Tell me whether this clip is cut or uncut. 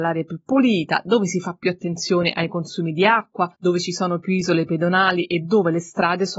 cut